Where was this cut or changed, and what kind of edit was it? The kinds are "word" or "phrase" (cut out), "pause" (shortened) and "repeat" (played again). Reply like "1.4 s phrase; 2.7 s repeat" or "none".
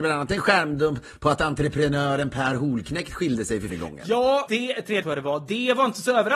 3.7 s word; 4.5 s word; 5.0 s word